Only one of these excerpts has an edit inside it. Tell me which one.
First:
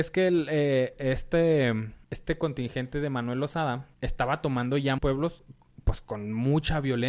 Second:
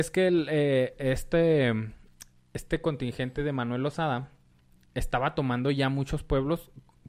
first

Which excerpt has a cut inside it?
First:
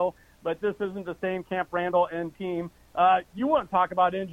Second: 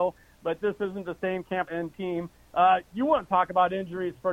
second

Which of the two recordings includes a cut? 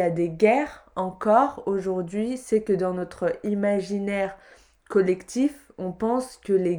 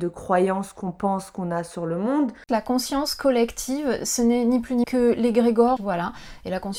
second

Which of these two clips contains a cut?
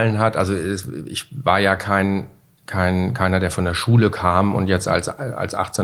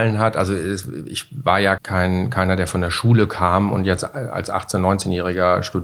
second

